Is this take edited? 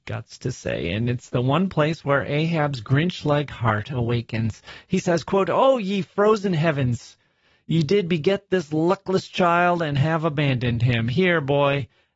no; 0 cuts

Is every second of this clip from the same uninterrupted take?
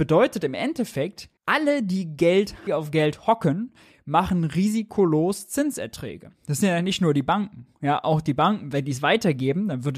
no; 2 cuts; at 1.4 s, 2.7 s

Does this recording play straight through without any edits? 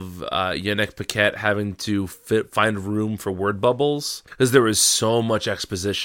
no; 1 cut; at 4.3 s

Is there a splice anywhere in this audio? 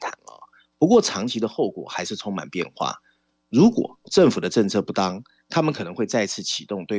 no; 0 cuts

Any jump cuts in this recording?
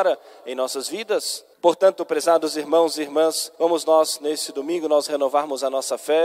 yes; 2 cuts; at 1.5 s, 3.5 s

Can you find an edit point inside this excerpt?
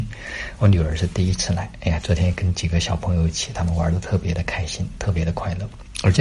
no; 0 cuts

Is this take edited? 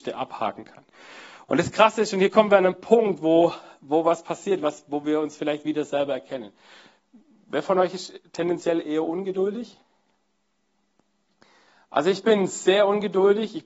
no; 0 cuts

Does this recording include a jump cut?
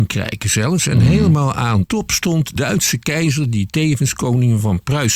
yes; 2 cuts; at 1.8 s, 2.6 s

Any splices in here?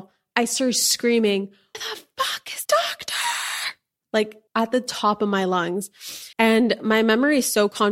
yes; 4 cuts; at 1.7 s, 2.6 s, 4.5 s, 6.3 s

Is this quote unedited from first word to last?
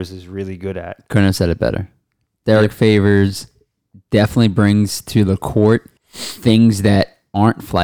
no; 1 cut; at 6.0 s

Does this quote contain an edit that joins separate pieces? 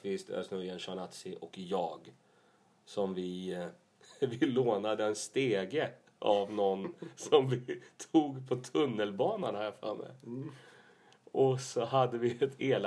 no; 0 cuts

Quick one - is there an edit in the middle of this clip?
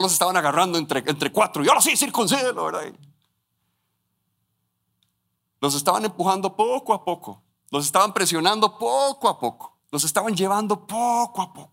yes; 1 cut; at 9.8 s

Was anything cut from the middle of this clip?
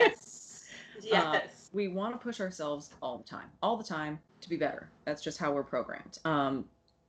yes; 2 cuts; at 1.7 s, 4.3 s

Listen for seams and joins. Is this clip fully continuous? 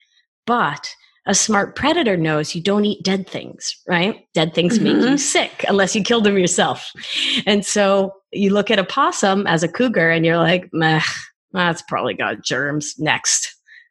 yes; 0 cuts

